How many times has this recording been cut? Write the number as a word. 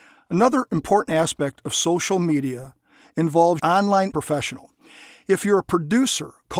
two